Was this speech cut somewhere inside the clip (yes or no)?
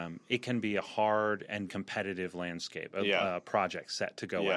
yes